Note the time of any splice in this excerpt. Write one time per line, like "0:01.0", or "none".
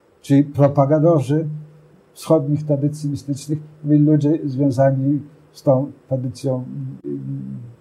none